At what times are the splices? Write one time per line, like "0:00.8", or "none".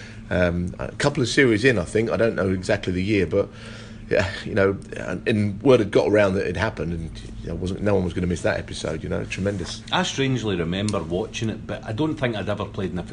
0:11.8